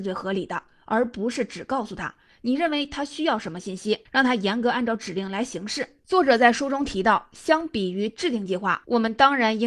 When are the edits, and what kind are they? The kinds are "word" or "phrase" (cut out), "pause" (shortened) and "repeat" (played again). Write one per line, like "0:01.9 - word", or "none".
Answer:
none